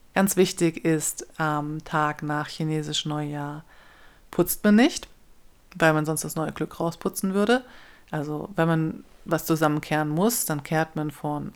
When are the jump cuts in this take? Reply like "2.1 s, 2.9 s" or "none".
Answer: none

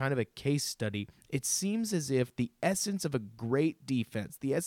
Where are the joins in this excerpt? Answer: none

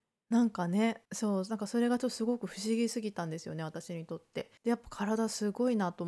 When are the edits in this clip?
1.1 s, 4.6 s

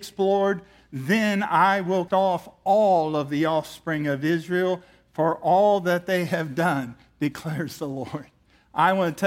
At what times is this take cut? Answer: 2.1 s

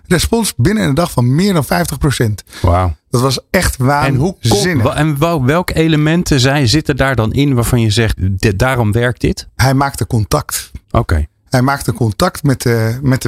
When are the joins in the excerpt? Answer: 8.2 s, 10.8 s

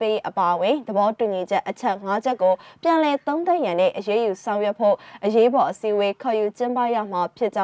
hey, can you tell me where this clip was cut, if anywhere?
none

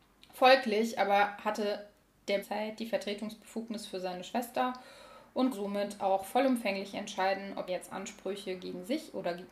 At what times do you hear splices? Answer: 2.4 s, 5.5 s, 7.7 s

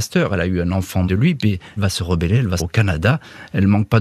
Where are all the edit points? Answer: 1.1 s, 1.8 s, 2.6 s

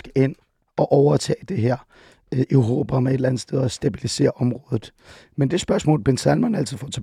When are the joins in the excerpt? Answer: none

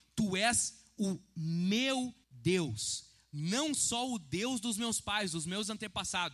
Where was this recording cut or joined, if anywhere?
2.2 s

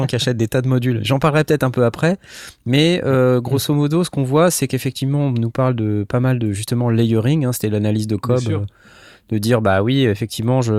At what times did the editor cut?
none

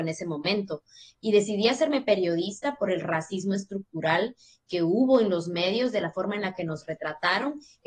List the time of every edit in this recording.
none

